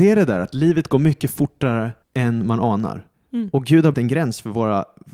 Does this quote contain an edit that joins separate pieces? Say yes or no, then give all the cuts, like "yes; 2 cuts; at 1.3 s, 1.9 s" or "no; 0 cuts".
yes; 3 cuts; at 2.0 s, 3.1 s, 3.9 s